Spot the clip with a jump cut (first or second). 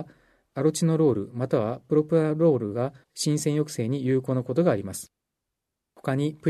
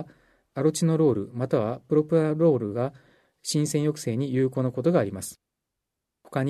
first